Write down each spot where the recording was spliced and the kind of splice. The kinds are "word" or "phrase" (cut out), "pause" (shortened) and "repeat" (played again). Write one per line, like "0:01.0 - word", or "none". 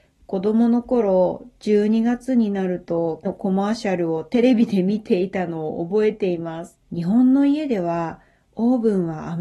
0:03.2 - word
0:06.8 - pause